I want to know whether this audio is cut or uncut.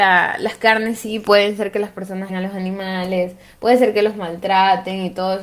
cut